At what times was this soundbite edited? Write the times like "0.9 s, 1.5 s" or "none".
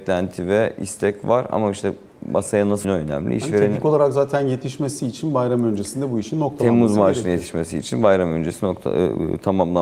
2.8 s